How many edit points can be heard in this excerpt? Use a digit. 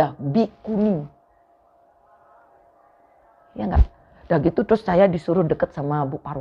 0